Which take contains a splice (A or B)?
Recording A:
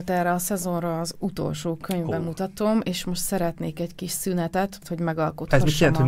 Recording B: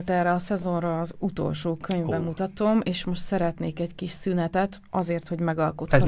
A